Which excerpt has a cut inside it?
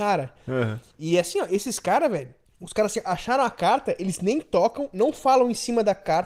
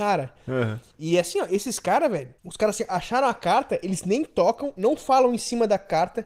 second; 1 cut; at 2.4 s

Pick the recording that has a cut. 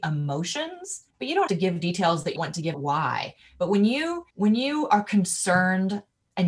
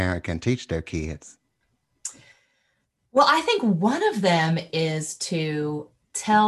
first; 5 cuts; at 1.1 s, 1.5 s, 2.4 s, 2.7 s, 4.3 s

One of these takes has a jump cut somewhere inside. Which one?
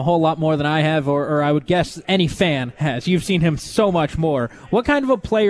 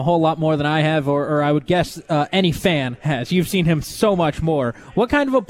first; 1 cut; at 2.0 s

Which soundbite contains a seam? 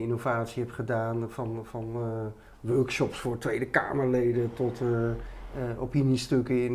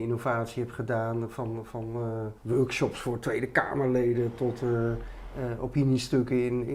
second; 1 cut; at 2.4 s

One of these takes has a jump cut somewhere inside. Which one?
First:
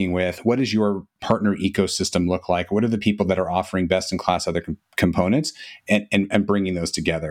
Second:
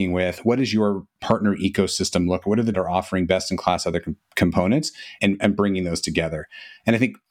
second; 3 cuts; at 2.4 s, 2.7 s, 5.2 s

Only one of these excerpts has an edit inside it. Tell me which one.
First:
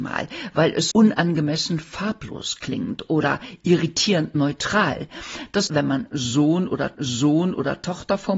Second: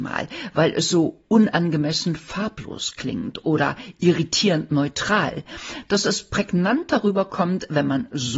first; 3 cuts; at 0.9 s, 5.7 s, 6.9 s

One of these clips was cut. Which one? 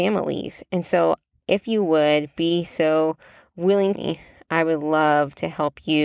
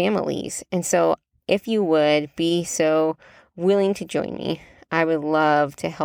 first; 1 cut; at 3.9 s

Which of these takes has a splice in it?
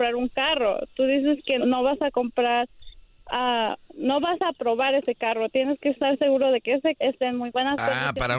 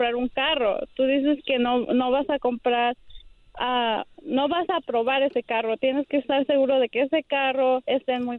first; 2 cuts; at 1.6 s, 7.0 s

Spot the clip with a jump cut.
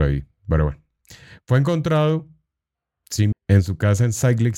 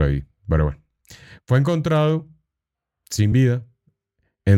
first; 1 cut; at 3.3 s

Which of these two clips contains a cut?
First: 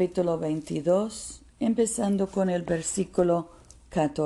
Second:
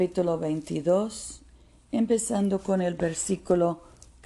first; 1 cut; at 1.5 s

